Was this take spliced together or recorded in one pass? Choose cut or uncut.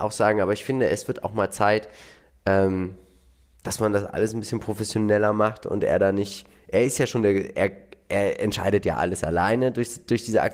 uncut